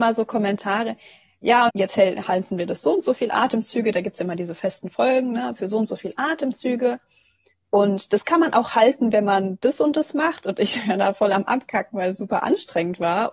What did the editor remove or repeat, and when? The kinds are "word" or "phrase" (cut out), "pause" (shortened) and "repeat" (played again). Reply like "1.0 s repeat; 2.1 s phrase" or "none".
1.7 s word